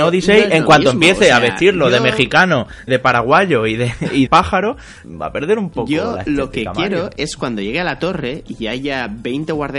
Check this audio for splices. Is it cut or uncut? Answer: cut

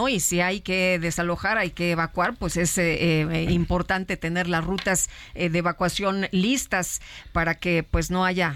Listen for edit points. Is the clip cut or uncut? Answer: uncut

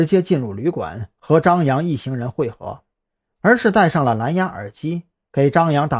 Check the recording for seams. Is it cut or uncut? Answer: uncut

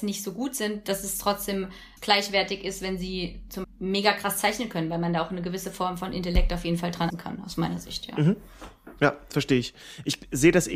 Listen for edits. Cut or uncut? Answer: cut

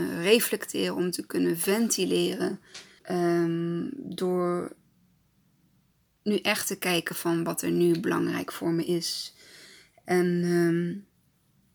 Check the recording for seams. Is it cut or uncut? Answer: cut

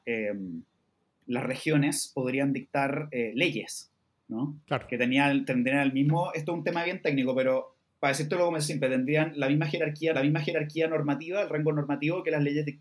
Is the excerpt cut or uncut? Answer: cut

